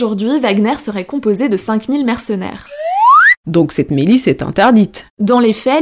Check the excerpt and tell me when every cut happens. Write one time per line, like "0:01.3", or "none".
none